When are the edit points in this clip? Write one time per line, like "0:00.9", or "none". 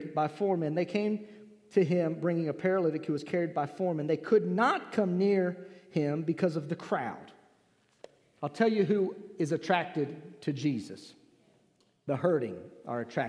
none